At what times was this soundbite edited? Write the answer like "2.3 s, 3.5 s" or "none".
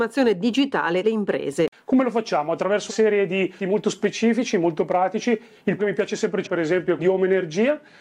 1.0 s, 2.9 s, 3.6 s, 5.8 s, 6.4 s, 7.0 s